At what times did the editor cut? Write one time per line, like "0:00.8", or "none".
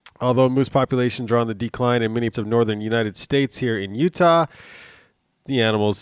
0:02.3